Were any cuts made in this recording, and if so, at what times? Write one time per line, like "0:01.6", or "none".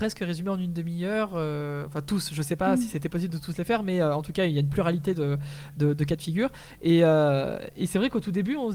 none